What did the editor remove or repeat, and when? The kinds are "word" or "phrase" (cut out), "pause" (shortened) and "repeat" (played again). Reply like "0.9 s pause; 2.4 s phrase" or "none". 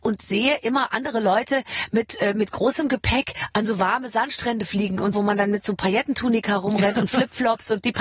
5.1 s word